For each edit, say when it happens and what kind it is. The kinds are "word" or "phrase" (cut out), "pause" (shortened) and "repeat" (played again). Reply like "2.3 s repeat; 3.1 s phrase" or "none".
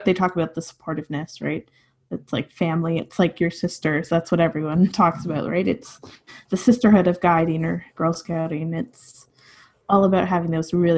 none